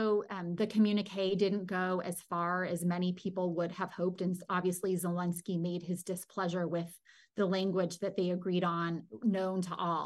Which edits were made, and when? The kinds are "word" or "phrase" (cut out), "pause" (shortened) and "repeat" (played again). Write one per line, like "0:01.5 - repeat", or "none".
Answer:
none